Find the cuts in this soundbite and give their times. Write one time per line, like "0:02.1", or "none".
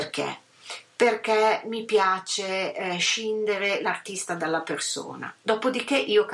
none